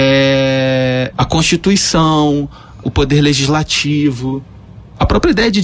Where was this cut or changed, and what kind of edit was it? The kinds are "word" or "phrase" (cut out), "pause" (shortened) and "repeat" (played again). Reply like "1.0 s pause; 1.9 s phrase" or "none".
1.1 s word; 2.8 s word